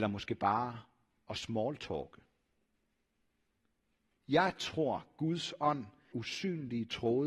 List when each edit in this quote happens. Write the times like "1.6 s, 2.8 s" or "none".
6.1 s